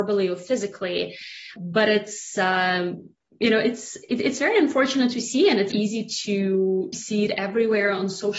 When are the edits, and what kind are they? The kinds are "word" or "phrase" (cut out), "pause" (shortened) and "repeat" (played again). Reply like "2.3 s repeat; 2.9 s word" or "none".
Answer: 1.6 s word; 5.7 s word; 6.9 s word